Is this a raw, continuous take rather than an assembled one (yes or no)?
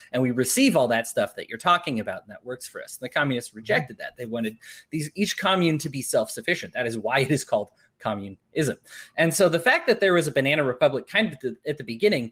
yes